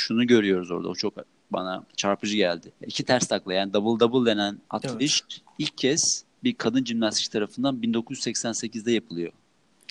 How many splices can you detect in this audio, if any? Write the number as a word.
four